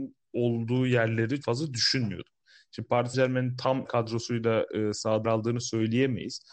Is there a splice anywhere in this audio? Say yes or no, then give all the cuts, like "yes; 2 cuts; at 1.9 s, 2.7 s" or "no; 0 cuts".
yes; 4 cuts; at 1.4 s, 3.1 s, 3.9 s, 5.2 s